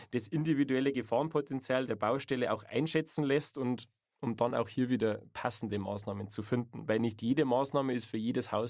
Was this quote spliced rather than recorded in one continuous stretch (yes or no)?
no